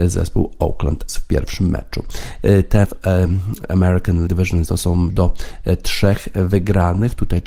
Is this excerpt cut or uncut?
cut